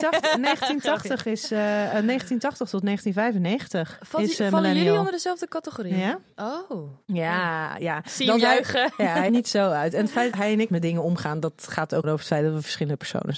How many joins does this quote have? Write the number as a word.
five